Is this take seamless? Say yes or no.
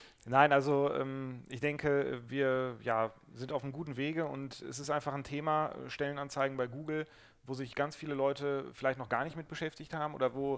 yes